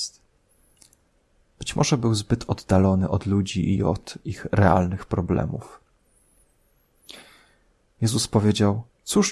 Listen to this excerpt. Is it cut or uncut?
uncut